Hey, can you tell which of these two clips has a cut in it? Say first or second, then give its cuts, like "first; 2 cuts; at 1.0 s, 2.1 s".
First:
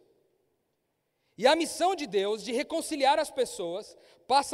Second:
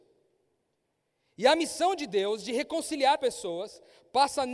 second; 1 cut; at 3.2 s